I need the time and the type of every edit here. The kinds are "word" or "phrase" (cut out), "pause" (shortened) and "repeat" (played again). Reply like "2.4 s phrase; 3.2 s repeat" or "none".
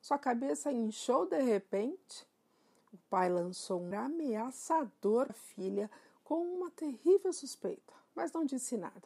3.9 s word; 5.3 s word